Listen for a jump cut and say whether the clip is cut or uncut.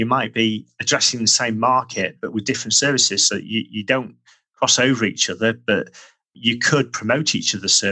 uncut